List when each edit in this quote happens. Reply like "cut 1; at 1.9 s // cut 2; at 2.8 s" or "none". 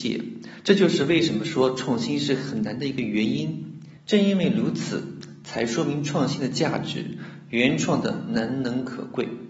cut 1; at 4.0 s